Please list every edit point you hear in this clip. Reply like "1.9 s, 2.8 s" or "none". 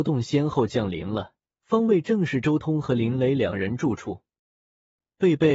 1.4 s